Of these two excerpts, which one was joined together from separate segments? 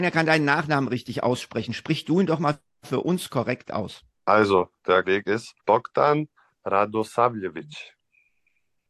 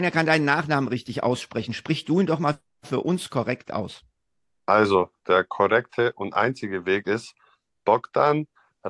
first; 3 cuts; at 4.1 s, 5.0 s, 5.6 s

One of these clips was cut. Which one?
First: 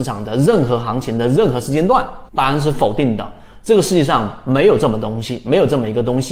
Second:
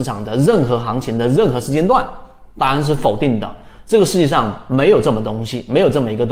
first; 1 cut; at 2.3 s

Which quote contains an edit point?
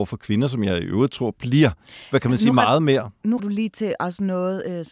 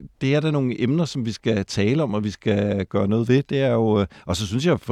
first; 1 cut; at 3.4 s

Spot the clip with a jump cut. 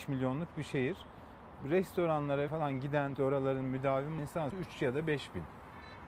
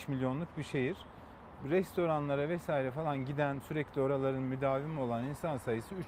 first; 4 cuts; at 2.5 s, 3.2 s, 4.2 s, 4.5 s

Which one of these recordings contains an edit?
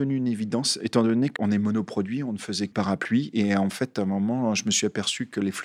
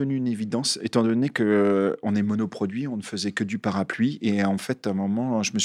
first; 2 cuts; at 1.4 s, 2.7 s

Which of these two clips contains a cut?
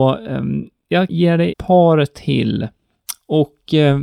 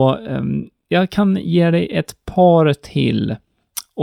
first; 2 cuts; at 1.1 s, 1.5 s

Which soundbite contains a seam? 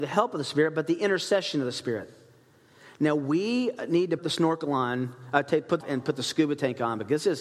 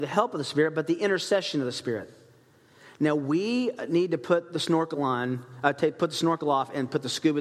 first; 2 cuts; at 4.2 s, 5.8 s

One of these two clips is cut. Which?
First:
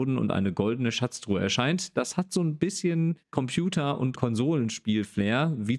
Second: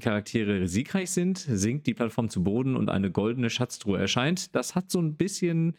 first; 1 cut; at 3.2 s

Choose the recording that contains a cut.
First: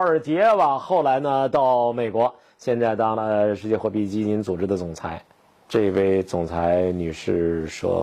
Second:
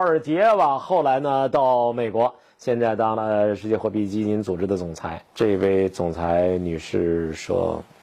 second; 1 cut; at 5.3 s

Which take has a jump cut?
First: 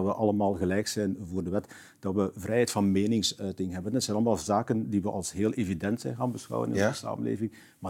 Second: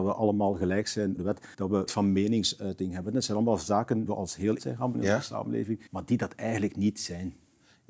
second; 7 cuts; at 1.2 s, 1.5 s, 1.9 s, 4.1 s, 4.6 s, 4.9 s, 5.9 s

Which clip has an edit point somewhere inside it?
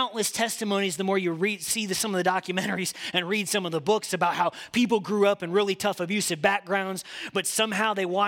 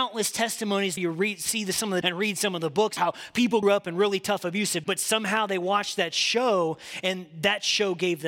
second; 5 cuts; at 1.0 s, 2.0 s, 3.0 s, 3.6 s, 4.8 s

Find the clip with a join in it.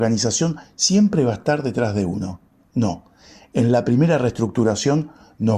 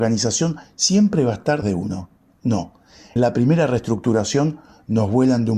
second; 2 cuts; at 1.6 s, 3.2 s

